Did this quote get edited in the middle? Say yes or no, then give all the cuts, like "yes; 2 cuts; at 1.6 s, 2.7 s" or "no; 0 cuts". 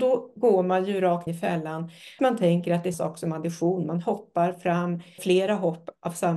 yes; 4 cuts; at 1.3 s, 2.2 s, 2.9 s, 5.2 s